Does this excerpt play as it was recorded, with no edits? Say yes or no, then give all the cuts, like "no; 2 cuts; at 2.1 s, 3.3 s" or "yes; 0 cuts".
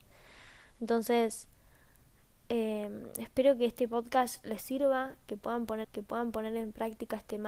no; 1 cut; at 5.8 s